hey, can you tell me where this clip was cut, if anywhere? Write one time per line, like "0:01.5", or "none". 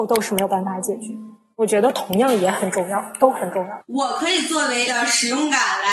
0:04.9